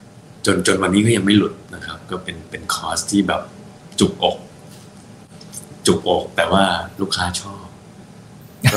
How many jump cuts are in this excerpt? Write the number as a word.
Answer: one